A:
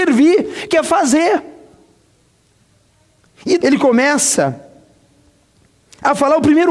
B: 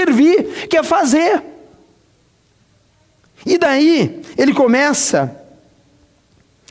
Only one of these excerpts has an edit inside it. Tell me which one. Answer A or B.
A